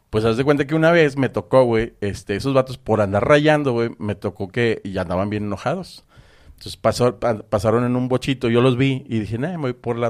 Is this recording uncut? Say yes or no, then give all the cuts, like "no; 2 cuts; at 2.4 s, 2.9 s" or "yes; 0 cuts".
yes; 0 cuts